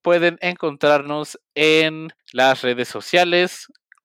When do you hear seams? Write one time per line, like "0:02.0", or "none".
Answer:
0:02.2